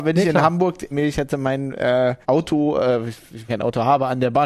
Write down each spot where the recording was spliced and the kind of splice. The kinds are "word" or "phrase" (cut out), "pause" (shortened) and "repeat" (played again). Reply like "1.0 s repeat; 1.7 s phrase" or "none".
0.9 s phrase; 2.2 s pause; 3.5 s phrase